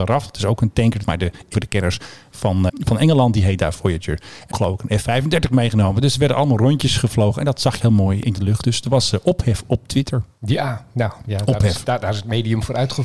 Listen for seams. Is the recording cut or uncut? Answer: cut